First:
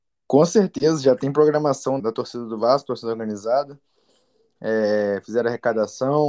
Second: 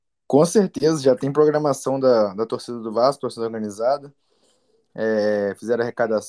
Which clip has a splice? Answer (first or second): first